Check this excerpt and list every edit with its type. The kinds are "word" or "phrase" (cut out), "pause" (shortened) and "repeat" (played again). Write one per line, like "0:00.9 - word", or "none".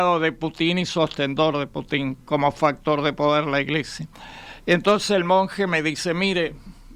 none